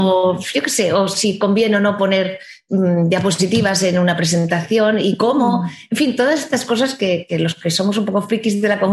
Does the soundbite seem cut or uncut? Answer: uncut